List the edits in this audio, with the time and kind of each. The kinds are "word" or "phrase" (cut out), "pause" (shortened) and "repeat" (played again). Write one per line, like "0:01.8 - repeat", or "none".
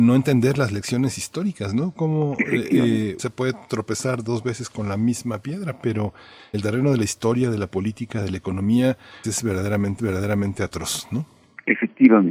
0:03.2 - phrase
0:06.5 - word
0:09.2 - word
0:10.0 - repeat